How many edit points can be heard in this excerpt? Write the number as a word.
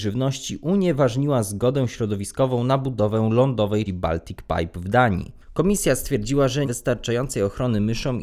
two